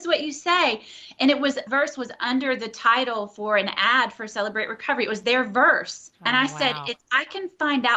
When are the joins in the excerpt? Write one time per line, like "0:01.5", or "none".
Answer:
0:01.7